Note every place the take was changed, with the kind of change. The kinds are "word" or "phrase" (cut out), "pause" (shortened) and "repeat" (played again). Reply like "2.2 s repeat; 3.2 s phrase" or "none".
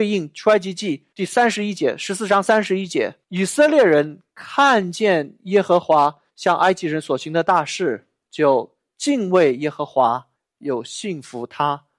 1.1 s pause; 3.2 s pause; 4.3 s pause; 6.3 s pause; 10.3 s pause